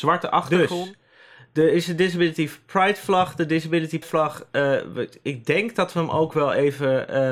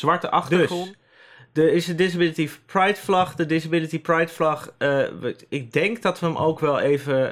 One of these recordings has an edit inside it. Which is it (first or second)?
first